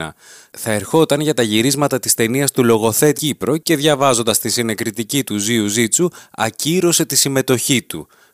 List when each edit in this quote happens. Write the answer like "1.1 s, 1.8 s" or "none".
3.1 s, 5.2 s